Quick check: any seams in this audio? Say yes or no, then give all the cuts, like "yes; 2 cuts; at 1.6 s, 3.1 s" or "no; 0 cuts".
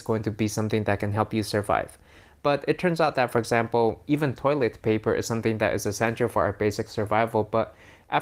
no; 0 cuts